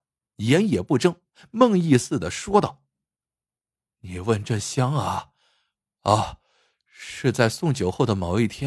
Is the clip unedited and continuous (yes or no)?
yes